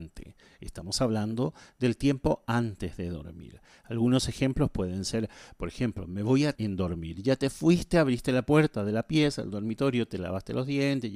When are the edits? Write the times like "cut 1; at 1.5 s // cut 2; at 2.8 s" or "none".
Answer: cut 1; at 6.6 s